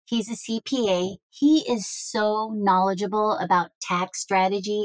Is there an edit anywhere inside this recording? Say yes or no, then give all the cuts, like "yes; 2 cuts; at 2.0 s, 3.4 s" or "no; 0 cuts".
no; 0 cuts